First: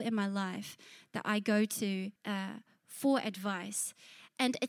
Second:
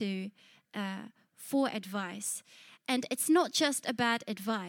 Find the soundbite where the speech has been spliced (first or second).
first